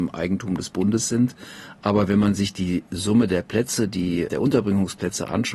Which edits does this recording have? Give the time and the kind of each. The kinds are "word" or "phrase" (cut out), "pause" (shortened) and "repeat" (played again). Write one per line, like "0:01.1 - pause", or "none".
0:04.3 - word